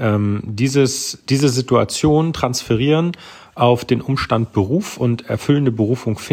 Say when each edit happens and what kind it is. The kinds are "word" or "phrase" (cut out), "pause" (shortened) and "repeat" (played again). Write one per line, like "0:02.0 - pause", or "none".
none